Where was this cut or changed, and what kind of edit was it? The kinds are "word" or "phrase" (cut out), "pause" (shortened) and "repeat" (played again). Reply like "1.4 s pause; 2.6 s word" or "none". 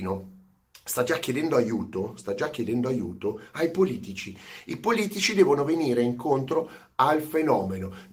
none